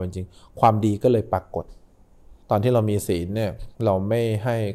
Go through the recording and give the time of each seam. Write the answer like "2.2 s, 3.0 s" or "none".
2.4 s, 3.8 s